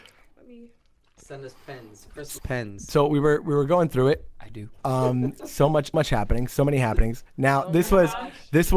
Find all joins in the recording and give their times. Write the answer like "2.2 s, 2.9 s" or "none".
2.4 s, 5.9 s